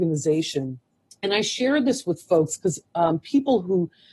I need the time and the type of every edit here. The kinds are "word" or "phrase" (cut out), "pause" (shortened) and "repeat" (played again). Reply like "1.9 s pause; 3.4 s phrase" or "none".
none